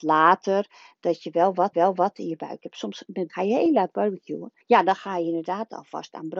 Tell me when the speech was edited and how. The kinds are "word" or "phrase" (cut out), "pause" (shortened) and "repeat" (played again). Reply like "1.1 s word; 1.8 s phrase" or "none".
1.7 s repeat; 3.3 s word; 4.6 s pause